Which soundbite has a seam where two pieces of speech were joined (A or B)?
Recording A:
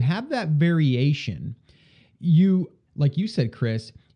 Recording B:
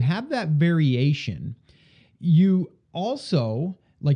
A